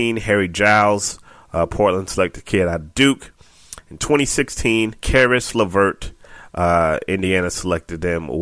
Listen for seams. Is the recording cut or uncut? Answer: cut